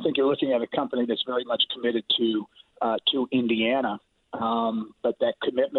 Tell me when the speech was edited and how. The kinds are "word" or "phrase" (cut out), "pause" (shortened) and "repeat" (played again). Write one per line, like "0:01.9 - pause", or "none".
none